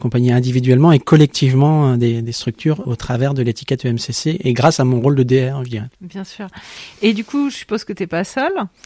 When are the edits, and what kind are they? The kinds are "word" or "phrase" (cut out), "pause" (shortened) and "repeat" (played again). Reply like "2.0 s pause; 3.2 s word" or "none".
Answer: 2.8 s word; 5.9 s pause